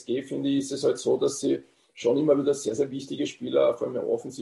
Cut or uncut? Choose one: uncut